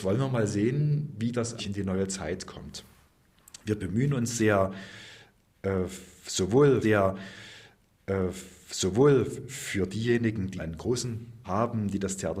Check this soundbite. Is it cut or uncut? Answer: cut